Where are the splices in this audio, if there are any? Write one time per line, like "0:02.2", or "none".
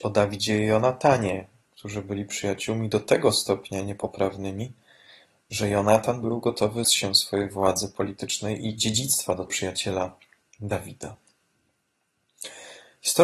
0:06.8
0:09.5